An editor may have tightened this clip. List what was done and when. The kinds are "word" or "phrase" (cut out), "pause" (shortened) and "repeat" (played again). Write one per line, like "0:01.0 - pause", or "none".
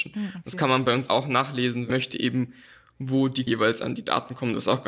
0:01.1 - word
0:01.9 - word
0:03.5 - word